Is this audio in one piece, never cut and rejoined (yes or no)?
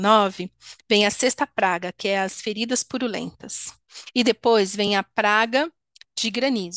yes